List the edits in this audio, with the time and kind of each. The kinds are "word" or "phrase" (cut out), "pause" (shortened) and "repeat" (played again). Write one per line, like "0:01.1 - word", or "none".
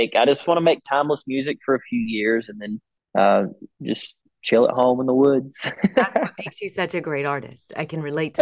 0:03.0 - pause